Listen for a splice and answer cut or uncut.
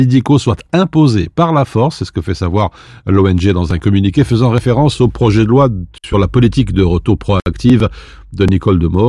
uncut